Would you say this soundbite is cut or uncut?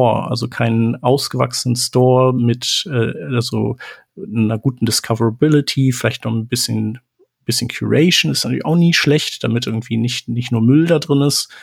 uncut